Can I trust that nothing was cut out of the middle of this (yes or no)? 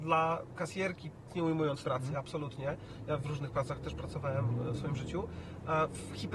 no